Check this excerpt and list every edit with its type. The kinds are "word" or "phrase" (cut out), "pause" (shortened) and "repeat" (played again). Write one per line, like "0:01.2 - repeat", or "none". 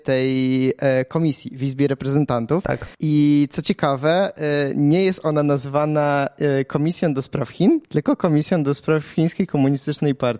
0:02.9 - pause
0:07.8 - pause